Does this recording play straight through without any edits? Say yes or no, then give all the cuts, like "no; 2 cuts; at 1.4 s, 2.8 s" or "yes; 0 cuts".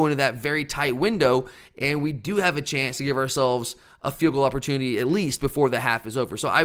yes; 0 cuts